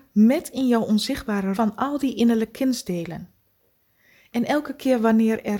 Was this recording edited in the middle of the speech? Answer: yes; 1 cut; at 1.5 s

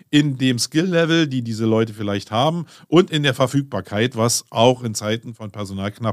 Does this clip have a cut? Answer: no; 0 cuts

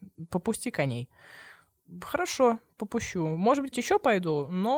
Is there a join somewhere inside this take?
yes; 1 cut; at 3.7 s

